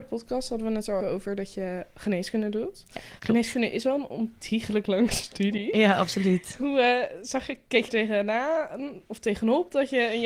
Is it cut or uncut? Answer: cut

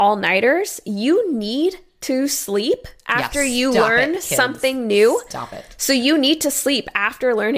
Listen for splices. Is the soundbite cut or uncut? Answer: uncut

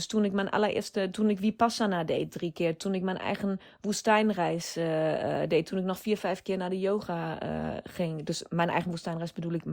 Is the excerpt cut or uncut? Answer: uncut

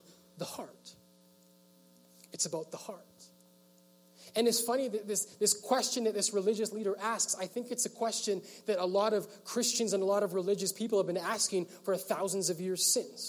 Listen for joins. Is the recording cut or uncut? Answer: uncut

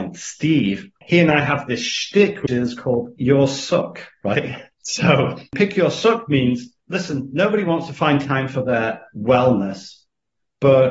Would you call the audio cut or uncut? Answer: cut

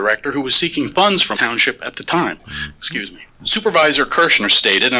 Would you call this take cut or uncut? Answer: cut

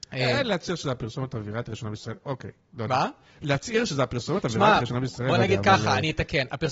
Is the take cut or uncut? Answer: uncut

